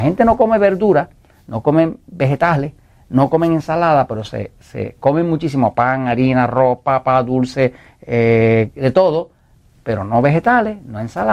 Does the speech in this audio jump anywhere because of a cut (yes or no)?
no